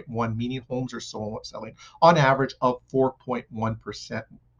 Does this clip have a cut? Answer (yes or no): no